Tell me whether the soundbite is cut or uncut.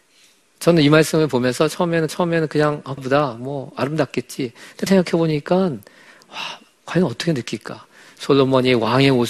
cut